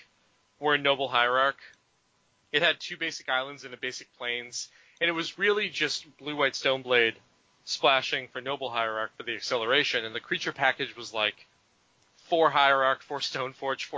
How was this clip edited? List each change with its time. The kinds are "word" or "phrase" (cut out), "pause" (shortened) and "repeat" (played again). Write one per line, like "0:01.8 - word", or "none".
none